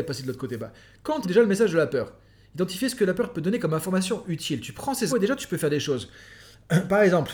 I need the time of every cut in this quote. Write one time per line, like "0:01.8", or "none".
0:01.2
0:05.1